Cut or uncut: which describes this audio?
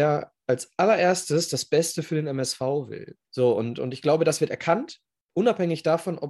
cut